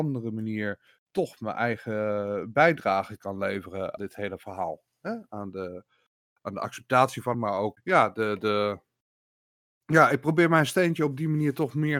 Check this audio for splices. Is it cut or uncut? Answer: cut